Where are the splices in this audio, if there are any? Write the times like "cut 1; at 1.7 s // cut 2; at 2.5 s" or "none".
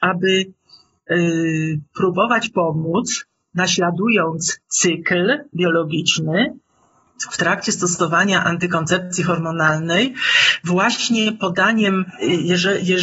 cut 1; at 4.6 s